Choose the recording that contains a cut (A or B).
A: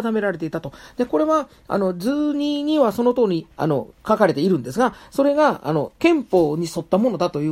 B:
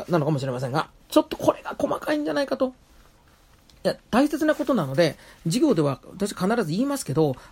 A